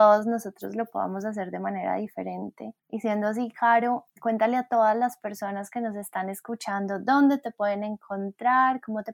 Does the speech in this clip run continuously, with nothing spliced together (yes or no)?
no